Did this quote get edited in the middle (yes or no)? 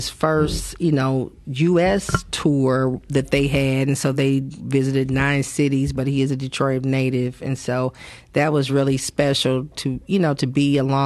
no